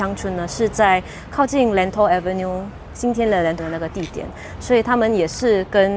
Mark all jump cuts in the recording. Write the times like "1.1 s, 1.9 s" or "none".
3.6 s